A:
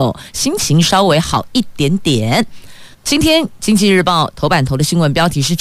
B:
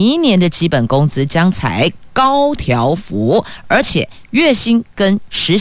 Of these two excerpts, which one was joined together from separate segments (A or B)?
A